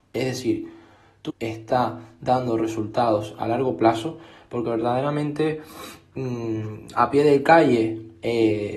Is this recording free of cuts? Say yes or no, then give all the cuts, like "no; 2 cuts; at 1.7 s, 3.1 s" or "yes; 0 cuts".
no; 1 cut; at 1.3 s